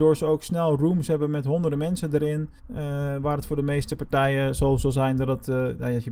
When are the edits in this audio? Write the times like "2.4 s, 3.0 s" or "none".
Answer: 2.6 s